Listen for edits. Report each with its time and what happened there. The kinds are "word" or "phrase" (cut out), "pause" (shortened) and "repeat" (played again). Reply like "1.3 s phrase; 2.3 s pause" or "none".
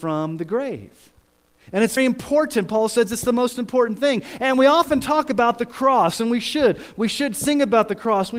2.0 s word

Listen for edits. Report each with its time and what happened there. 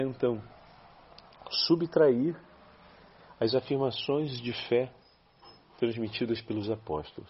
none

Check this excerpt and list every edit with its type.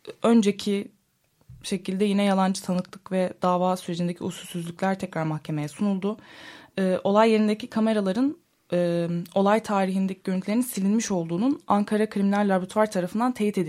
none

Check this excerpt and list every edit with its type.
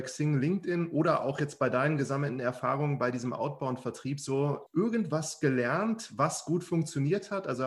4.7 s pause

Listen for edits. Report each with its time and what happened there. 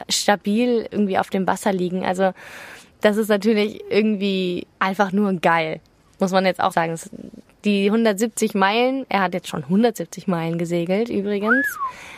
4.8 s word; 6.7 s word

